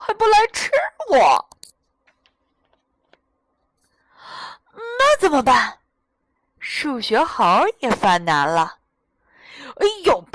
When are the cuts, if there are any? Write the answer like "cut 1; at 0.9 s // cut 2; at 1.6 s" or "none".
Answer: none